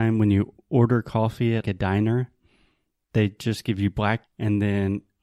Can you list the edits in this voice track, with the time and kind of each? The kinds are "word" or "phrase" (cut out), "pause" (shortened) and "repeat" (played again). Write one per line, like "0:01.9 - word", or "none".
0:01.6 - word
0:04.2 - word